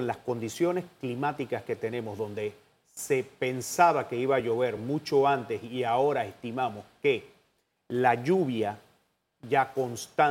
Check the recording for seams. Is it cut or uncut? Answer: uncut